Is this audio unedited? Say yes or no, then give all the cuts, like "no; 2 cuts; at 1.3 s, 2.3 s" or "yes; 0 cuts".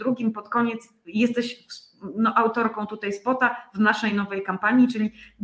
yes; 0 cuts